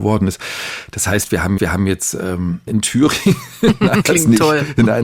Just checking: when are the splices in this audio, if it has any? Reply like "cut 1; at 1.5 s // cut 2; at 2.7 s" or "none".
cut 1; at 1.6 s // cut 2; at 2.7 s // cut 3; at 4.0 s